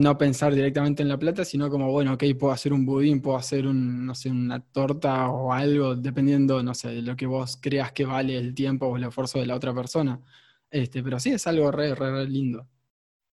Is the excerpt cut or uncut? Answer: uncut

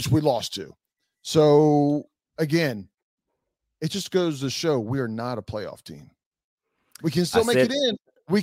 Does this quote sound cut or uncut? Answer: uncut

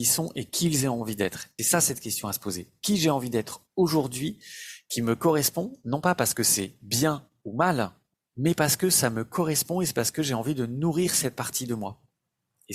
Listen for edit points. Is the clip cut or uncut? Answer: cut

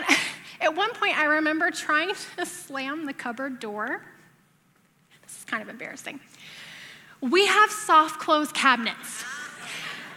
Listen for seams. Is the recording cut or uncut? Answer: uncut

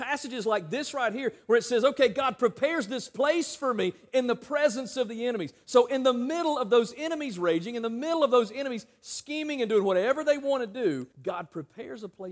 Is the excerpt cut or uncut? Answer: cut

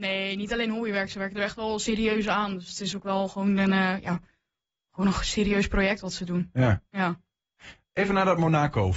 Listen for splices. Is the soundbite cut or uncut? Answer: uncut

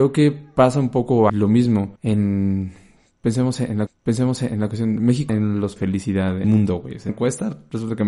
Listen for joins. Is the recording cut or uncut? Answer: cut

